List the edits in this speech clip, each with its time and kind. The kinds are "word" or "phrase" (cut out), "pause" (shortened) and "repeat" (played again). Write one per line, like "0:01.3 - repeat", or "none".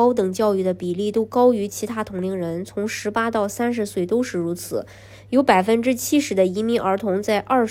none